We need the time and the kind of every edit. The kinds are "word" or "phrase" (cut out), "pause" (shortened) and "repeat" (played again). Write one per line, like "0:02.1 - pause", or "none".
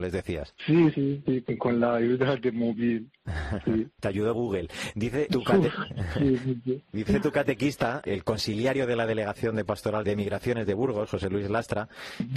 0:00.9 - word
0:04.3 - word
0:05.3 - word
0:06.9 - word
0:08.0 - word
0:10.0 - word